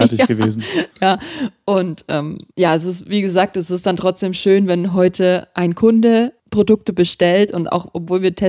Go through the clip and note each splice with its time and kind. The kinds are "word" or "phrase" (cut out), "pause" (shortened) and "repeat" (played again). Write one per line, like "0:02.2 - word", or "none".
0:00.9 - pause
0:02.5 - pause
0:06.4 - pause

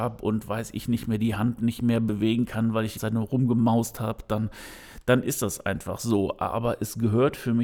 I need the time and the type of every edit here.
0:03.0 - word

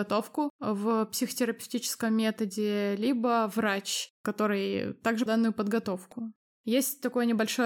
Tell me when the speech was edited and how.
0:05.3 - word

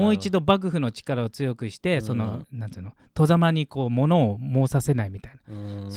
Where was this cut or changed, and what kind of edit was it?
0:02.4 - word

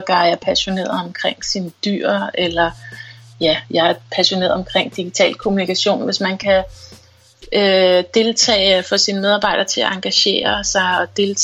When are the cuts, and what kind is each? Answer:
none

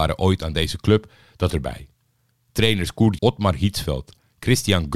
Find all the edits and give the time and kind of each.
0:01.5 - word
0:03.2 - word

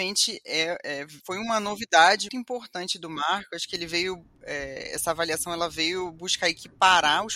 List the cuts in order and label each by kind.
0:01.2 - pause
0:02.3 - word

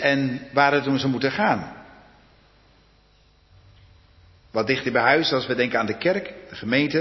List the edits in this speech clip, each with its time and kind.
none

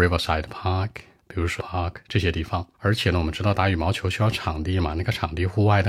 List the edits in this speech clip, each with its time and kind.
0:01.2 - pause
0:01.6 - word
0:02.7 - pause

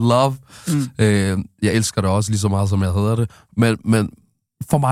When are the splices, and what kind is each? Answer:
none

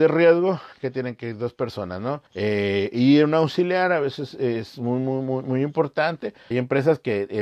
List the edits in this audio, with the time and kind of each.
0:02.3 - pause
0:06.5 - phrase

